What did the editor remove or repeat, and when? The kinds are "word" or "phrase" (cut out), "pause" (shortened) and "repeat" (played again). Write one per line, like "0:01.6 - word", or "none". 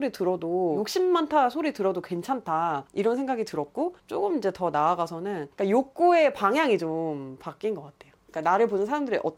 0:04.0 - pause